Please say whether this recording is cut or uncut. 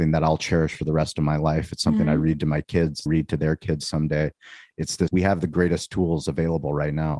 cut